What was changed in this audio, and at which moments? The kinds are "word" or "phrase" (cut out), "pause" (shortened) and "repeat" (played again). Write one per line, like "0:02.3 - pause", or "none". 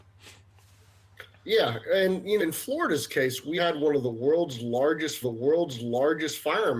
0:02.4 - word
0:03.6 - word
0:05.2 - repeat